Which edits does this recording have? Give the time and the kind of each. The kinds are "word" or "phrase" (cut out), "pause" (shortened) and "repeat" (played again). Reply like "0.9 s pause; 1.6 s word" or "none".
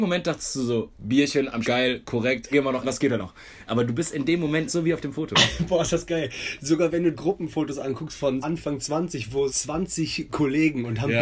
0.9 s word; 1.6 s word; 2.5 s word; 2.8 s word; 3.2 s word; 4.7 s word; 7.1 s word; 8.4 s word; 9.5 s word